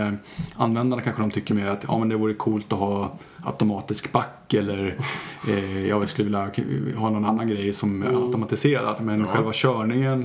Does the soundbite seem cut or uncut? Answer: cut